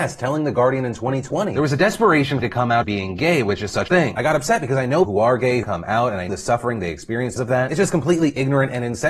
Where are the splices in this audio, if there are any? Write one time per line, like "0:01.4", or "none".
0:02.4
0:02.8
0:03.9
0:05.0
0:05.6
0:06.3
0:07.4

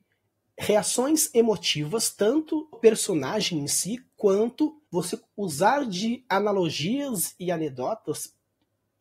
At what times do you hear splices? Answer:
0:02.7
0:04.9

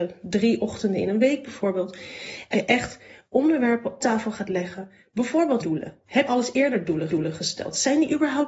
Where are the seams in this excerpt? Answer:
0:02.5
0:04.0
0:05.6
0:06.3
0:07.1

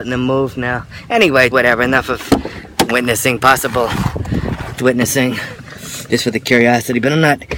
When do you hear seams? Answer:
0:01.5
0:02.9
0:04.8

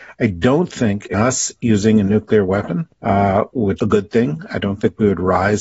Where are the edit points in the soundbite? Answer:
0:01.1
0:02.9
0:03.8

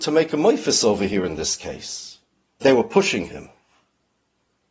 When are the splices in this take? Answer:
0:02.6

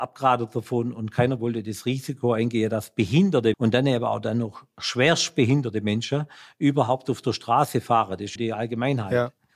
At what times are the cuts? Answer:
0:03.5
0:08.4

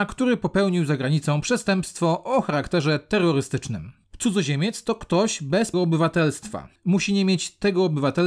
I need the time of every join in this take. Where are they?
0:05.7

